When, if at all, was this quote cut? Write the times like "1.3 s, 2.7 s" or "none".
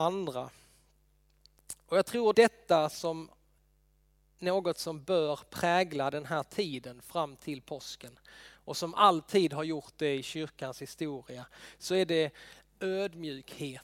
2.3 s